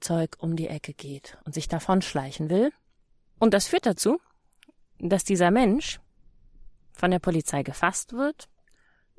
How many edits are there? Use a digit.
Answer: 0